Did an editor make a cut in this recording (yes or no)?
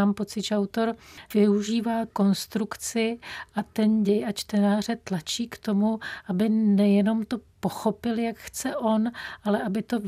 no